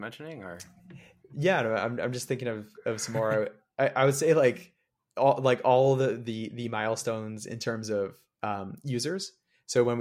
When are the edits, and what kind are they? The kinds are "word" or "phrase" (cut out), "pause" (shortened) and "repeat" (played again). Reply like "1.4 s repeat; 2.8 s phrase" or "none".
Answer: none